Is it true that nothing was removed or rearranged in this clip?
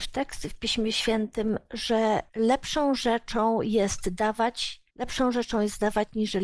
no; 2 cuts; at 2.3 s, 4.9 s

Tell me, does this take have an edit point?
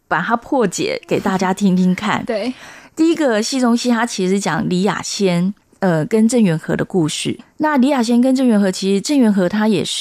no; 0 cuts

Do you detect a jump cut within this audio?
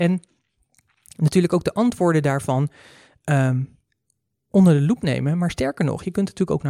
no; 0 cuts

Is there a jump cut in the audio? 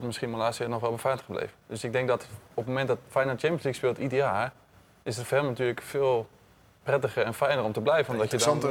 no; 0 cuts

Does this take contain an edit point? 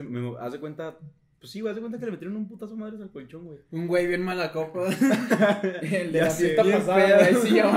no; 0 cuts

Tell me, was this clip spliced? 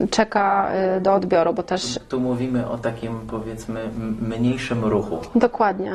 no; 0 cuts

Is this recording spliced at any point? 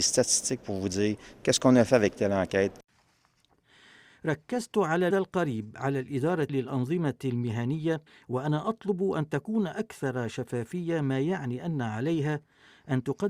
yes; 3 cuts; at 5.1 s, 6.5 s, 8.1 s

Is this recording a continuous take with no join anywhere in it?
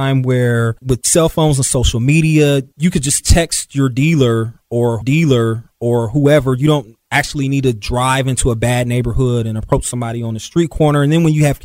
no; 1 cut; at 5.0 s

